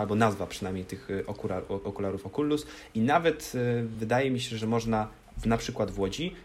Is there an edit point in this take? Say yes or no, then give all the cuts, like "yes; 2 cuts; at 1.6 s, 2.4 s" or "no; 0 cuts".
no; 0 cuts